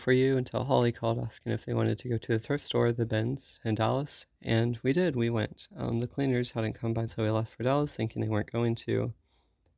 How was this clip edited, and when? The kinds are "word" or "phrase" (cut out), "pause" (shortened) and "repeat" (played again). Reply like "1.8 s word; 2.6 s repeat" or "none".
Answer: 7.1 s word